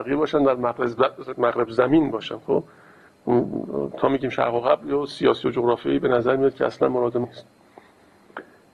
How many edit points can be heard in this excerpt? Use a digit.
1